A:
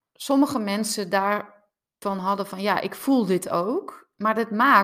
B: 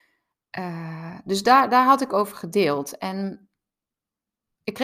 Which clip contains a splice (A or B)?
A